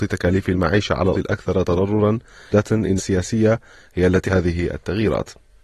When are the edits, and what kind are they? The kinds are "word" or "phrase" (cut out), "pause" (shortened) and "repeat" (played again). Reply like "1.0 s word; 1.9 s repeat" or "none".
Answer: 1.1 s word; 2.5 s word; 3.0 s word; 4.3 s word